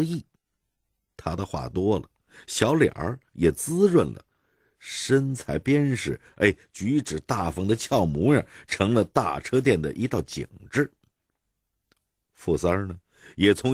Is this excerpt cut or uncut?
uncut